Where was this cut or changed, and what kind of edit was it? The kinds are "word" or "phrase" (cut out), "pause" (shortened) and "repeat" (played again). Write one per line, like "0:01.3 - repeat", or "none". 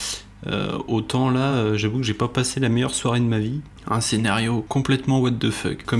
none